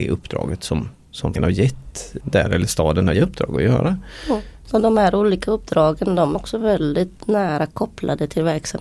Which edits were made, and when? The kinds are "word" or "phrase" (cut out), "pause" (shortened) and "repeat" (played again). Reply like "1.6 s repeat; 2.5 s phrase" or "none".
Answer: 1.4 s word; 2.2 s word; 3.1 s phrase; 6.3 s word